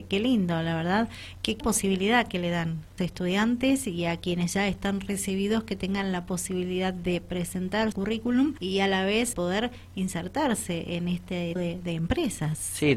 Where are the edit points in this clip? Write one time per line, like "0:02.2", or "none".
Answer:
0:01.6
0:03.0
0:07.9
0:08.6
0:09.3
0:11.6